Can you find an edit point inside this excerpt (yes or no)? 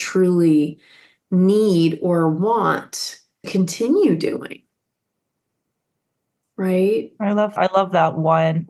yes